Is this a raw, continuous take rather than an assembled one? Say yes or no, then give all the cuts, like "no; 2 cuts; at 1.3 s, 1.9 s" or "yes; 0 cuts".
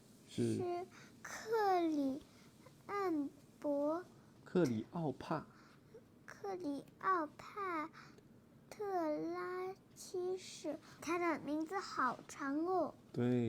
no; 1 cut; at 11.0 s